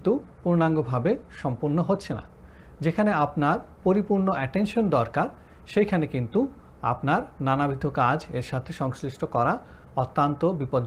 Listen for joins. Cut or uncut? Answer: uncut